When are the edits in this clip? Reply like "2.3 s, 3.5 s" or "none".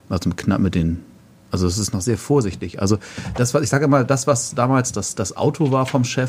none